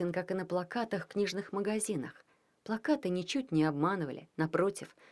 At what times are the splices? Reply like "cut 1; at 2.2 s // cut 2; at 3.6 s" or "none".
none